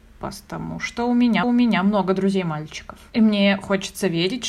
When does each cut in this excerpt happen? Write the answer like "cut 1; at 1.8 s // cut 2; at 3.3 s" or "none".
cut 1; at 1.4 s